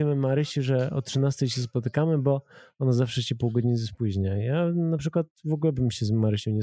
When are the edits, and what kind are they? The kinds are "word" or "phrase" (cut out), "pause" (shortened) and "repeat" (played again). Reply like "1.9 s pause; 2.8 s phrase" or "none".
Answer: none